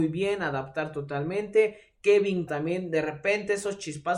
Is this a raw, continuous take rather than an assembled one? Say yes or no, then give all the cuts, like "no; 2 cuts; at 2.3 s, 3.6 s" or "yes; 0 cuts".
no; 1 cut; at 2.5 s